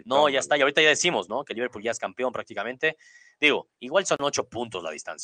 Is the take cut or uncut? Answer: uncut